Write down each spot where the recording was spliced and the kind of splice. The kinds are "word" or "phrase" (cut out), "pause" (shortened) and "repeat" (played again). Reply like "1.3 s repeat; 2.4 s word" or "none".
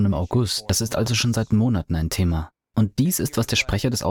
none